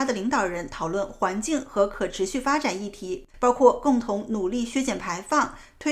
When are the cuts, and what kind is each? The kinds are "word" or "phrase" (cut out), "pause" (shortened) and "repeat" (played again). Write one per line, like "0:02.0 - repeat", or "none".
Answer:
0:03.3 - pause